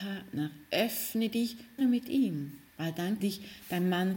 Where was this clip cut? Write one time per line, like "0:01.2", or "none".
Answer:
0:01.8
0:02.7
0:03.2